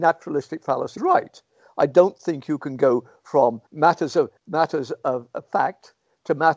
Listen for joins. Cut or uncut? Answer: cut